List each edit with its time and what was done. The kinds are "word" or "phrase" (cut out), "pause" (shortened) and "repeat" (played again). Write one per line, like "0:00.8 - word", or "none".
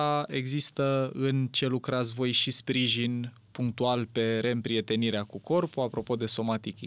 none